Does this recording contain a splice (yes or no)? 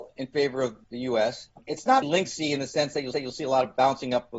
yes